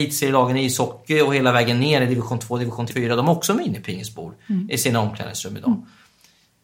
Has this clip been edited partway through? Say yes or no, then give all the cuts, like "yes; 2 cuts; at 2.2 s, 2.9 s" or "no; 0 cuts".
yes; 1 cut; at 2.9 s